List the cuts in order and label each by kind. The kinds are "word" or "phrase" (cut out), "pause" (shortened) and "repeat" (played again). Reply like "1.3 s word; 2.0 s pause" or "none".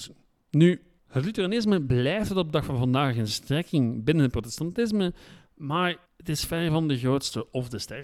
1.0 s pause; 6.1 s pause